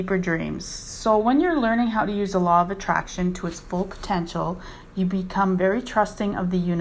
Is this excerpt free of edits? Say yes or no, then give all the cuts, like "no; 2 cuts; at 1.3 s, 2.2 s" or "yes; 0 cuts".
yes; 0 cuts